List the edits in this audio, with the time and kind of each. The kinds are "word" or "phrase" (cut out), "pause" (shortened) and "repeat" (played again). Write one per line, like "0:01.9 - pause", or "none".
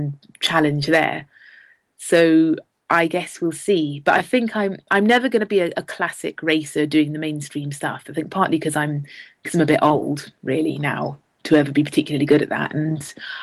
none